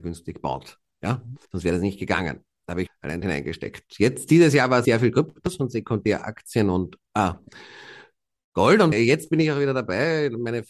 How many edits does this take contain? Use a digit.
6